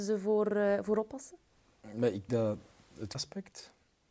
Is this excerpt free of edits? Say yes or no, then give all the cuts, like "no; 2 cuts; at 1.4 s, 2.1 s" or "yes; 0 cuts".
no; 2 cuts; at 2.3 s, 3.1 s